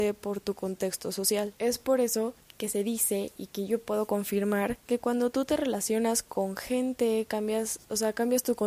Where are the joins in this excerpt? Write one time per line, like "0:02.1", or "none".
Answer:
0:01.6
0:02.4
0:04.8